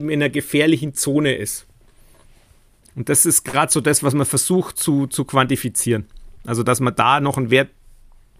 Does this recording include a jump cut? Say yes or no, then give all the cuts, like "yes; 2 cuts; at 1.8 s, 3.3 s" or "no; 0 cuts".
no; 0 cuts